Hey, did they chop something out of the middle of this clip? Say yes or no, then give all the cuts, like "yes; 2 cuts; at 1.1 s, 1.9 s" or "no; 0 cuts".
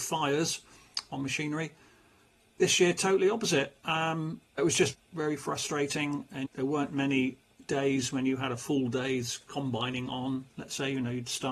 yes; 3 cuts; at 4.6 s, 4.9 s, 6.5 s